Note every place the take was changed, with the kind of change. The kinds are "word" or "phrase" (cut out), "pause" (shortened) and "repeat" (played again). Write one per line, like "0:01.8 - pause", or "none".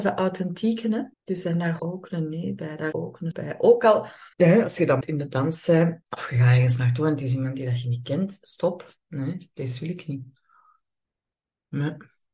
0:01.1 - pause
0:01.8 - word
0:02.9 - word
0:03.3 - word
0:04.3 - pause
0:05.0 - word
0:06.0 - pause